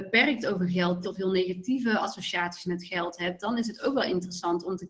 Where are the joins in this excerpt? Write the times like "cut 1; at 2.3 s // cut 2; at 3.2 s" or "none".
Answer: cut 1; at 1.0 s